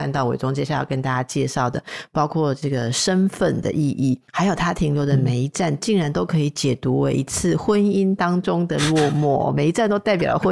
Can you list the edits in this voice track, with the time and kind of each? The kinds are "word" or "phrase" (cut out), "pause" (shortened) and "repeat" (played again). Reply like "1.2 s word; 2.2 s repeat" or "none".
4.3 s pause